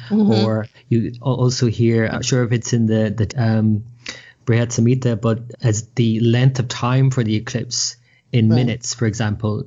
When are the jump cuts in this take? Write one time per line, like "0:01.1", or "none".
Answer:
0:02.1
0:03.3
0:05.5